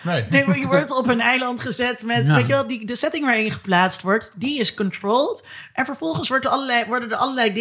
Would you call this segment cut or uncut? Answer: uncut